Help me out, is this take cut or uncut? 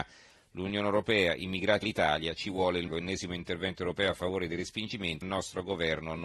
cut